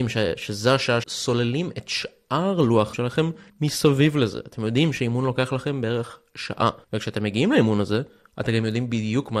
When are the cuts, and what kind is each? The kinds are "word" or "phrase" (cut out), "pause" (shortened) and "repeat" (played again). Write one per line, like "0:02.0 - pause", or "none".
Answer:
0:01.0 - phrase
0:02.9 - word
0:03.5 - pause
0:06.8 - pause